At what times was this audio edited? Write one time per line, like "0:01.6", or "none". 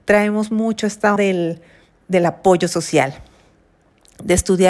0:01.2
0:02.0